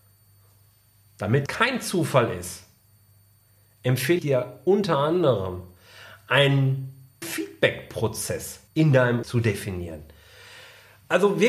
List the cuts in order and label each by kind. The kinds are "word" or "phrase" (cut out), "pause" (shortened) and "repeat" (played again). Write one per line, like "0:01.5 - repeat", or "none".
0:01.5 - word
0:04.2 - word
0:07.2 - word
0:08.7 - pause
0:09.2 - word